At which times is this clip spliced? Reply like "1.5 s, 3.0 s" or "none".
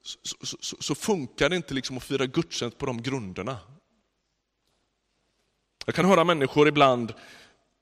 none